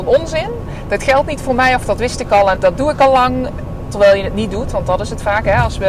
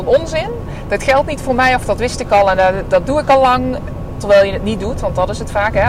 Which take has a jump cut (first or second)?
first